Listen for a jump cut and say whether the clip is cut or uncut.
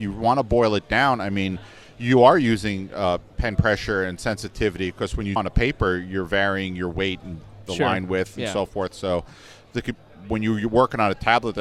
cut